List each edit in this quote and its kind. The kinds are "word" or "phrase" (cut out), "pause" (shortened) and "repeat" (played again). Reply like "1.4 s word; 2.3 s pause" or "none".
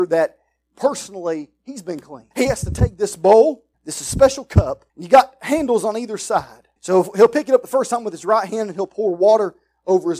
2.3 s pause; 3.7 s pause; 4.9 s pause; 6.8 s pause